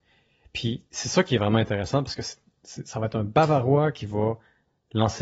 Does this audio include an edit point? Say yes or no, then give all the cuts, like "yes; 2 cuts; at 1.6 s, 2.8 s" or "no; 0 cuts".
no; 0 cuts